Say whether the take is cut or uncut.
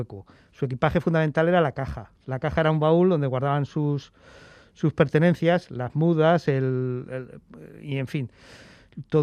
uncut